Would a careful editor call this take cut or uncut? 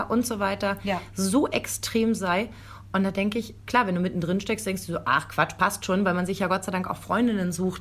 uncut